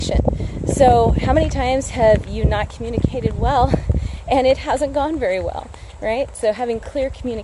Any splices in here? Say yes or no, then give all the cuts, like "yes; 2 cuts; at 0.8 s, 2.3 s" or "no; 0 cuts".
no; 0 cuts